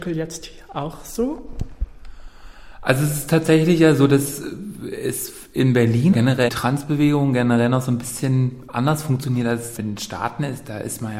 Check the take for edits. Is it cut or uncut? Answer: cut